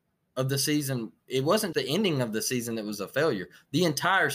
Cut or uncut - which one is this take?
cut